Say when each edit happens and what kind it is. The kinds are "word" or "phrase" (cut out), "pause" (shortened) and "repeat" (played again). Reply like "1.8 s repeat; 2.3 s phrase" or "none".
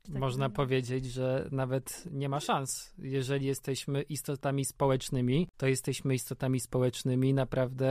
5.5 s pause